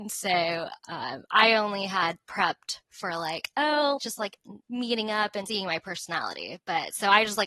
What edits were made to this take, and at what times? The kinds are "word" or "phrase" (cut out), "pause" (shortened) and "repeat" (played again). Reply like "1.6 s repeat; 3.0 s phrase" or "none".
2.8 s pause; 4.0 s word; 4.6 s pause; 5.5 s word